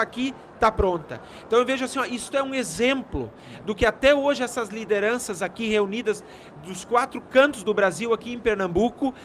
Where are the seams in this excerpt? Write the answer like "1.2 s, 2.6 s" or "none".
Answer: none